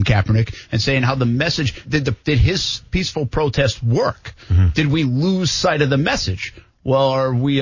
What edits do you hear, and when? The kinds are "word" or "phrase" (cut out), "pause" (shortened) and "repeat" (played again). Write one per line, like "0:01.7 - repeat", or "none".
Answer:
0:01.8 - word
0:02.2 - pause
0:02.9 - pause